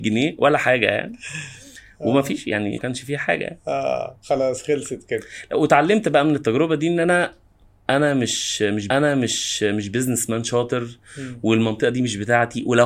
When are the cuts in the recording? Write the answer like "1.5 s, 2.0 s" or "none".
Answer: 2.8 s, 8.9 s